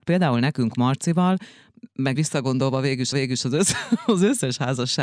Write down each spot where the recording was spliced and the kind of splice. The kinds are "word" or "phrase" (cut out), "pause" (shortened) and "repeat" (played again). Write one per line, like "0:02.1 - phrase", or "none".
0:02.2 - word
0:03.1 - repeat